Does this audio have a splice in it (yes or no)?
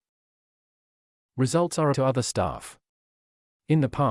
yes